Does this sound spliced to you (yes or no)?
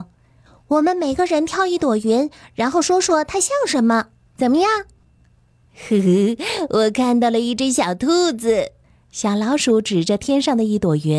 no